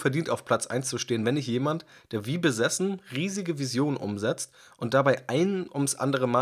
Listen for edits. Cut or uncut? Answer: uncut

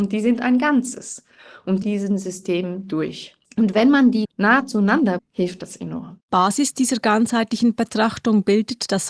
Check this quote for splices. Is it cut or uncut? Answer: cut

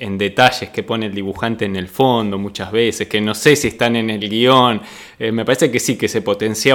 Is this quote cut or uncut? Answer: uncut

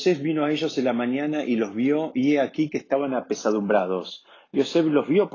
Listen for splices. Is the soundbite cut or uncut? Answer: uncut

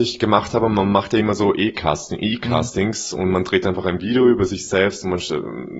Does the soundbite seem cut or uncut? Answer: uncut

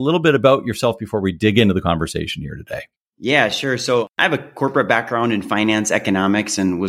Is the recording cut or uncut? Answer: uncut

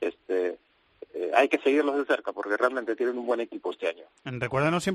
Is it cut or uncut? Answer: uncut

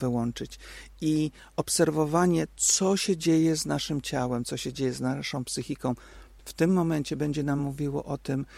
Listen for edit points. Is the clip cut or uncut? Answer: uncut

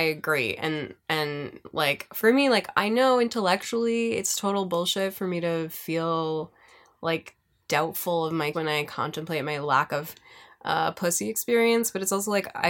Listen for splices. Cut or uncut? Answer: cut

